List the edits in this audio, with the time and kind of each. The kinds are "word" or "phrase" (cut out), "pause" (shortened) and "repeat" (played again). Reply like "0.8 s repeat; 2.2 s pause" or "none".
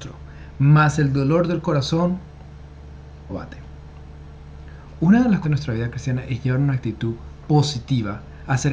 3.3 s phrase; 5.4 s phrase